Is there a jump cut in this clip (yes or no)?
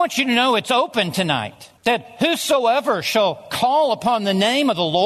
yes